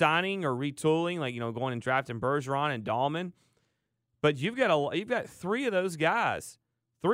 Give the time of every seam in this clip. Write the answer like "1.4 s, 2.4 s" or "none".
none